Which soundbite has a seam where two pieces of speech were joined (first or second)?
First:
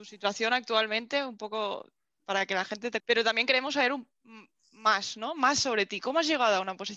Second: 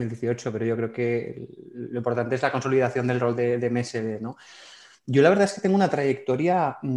first